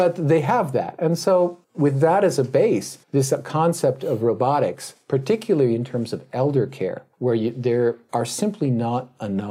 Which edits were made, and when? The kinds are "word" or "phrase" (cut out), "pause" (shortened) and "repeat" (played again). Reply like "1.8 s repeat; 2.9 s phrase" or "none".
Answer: 1.6 s pause; 3.0 s pause; 7.1 s pause